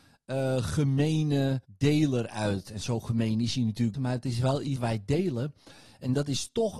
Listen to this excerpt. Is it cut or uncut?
cut